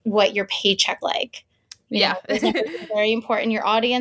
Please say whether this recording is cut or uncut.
cut